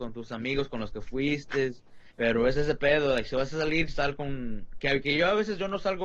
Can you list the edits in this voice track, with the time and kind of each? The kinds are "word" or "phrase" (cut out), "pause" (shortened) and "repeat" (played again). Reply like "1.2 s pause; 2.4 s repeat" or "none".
2.1 s pause